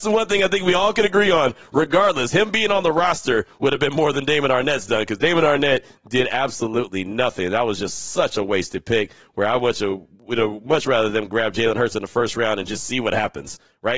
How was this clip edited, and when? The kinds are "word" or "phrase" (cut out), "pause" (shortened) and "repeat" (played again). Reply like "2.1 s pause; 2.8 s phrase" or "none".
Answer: none